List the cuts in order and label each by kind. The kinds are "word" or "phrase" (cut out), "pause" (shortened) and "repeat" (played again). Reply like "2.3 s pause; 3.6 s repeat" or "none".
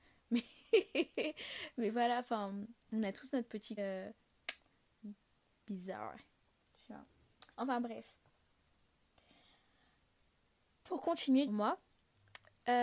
2.8 s pause; 3.8 s word; 7.5 s pause; 11.5 s phrase